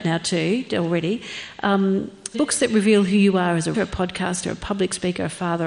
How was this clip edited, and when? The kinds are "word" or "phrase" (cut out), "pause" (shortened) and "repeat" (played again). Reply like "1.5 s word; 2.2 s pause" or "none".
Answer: 2.3 s word; 3.7 s word

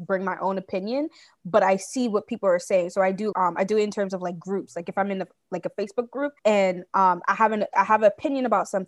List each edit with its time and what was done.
3.3 s word; 6.4 s pause

